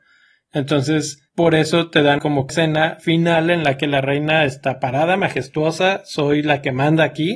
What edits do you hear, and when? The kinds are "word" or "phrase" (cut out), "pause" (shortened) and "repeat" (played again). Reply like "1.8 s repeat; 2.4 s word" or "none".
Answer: 1.3 s pause; 2.2 s word; 2.5 s word

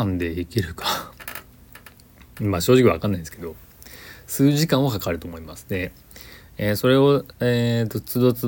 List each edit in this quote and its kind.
none

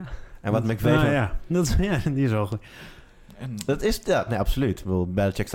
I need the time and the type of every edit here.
none

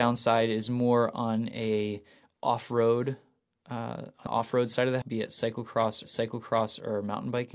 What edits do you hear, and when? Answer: 4.3 s word; 5.0 s word; 6.0 s repeat

